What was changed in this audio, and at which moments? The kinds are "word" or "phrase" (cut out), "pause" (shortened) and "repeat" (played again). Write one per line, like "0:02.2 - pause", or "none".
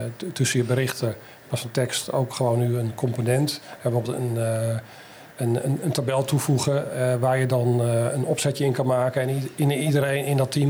0:05.3 - pause